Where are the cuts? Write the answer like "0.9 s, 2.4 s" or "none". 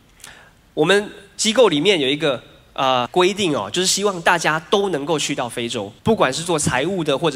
3.1 s, 6.0 s